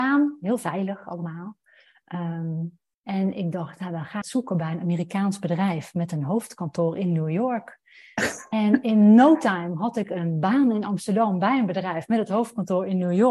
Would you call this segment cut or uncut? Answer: cut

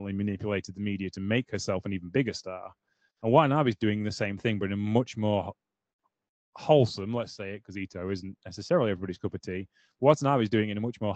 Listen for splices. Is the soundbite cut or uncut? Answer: uncut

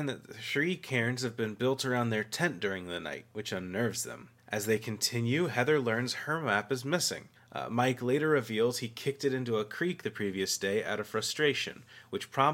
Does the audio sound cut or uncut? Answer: cut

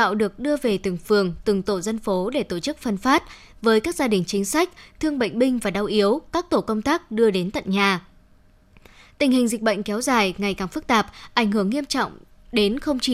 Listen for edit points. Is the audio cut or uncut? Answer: uncut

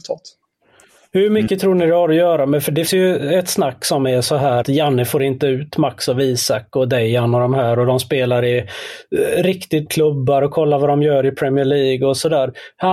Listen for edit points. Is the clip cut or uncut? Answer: cut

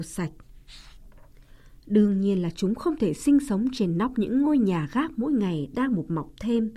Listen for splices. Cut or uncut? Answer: uncut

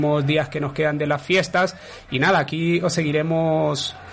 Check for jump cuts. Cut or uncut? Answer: uncut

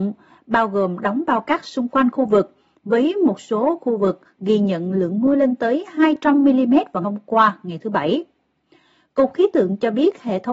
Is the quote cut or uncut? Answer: cut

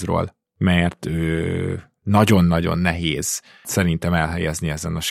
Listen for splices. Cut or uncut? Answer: cut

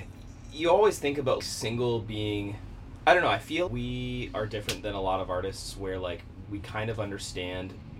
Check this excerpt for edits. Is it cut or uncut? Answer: cut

